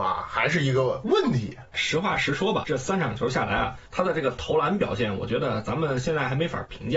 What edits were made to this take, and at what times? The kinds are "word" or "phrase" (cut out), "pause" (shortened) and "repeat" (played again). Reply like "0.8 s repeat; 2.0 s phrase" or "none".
2.6 s word